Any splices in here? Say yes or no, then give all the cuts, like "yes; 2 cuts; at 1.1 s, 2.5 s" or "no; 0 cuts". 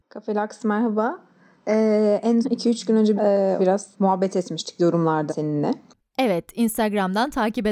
yes; 5 cuts; at 2.4 s, 3.2 s, 3.6 s, 3.9 s, 5.3 s